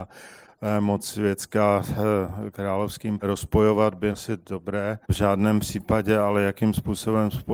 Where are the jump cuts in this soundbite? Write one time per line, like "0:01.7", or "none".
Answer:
0:03.2
0:04.1
0:05.0